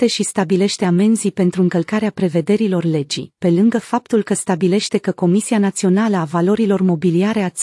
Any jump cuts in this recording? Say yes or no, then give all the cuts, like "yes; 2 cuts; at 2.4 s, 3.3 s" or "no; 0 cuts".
no; 0 cuts